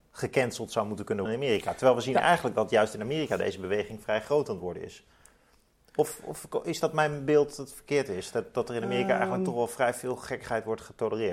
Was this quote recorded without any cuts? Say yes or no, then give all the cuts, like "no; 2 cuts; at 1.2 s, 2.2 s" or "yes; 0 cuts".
no; 1 cut; at 1.3 s